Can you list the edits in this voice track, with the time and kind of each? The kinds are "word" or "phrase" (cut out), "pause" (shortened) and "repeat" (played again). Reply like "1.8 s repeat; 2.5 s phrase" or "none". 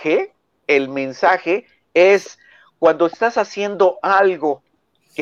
none